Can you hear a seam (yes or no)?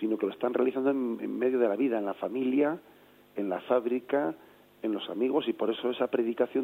no